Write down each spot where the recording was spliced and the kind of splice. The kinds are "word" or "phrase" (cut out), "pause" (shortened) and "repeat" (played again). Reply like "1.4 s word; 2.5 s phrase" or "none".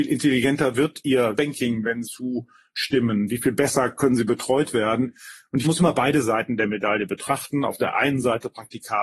1.4 s word; 2.0 s phrase; 5.6 s phrase